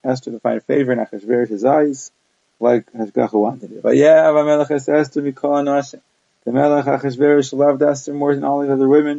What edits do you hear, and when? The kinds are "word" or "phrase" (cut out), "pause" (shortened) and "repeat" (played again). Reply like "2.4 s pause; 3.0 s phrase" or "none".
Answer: none